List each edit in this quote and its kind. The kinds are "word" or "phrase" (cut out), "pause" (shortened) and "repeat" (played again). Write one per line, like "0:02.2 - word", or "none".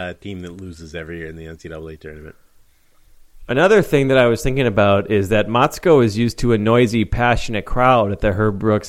none

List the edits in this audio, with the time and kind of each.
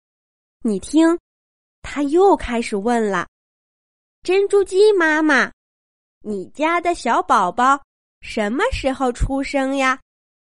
none

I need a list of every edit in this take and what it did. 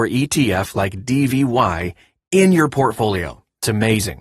none

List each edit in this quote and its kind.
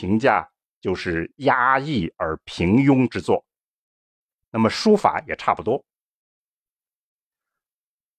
none

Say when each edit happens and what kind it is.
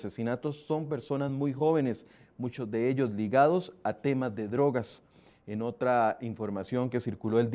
none

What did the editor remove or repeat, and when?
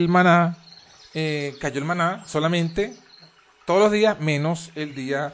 none

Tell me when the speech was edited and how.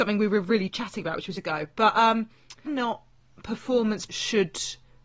0:01.4 - word
0:02.7 - phrase
0:04.1 - word

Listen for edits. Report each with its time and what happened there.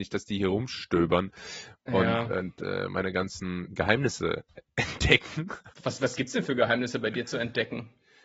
0:05.7 - pause

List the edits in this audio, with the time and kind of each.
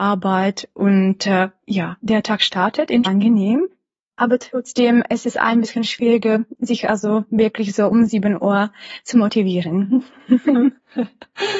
0:03.0 - phrase

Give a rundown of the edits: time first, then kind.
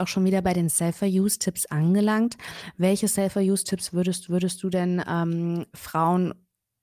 0:04.3 - repeat

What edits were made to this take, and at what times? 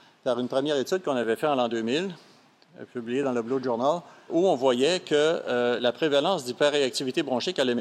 0:04.3 - word

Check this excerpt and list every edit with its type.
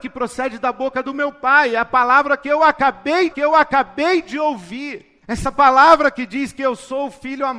0:03.3 - repeat
0:05.2 - pause

